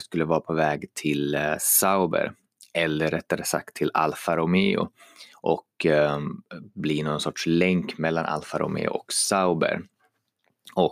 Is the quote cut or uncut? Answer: uncut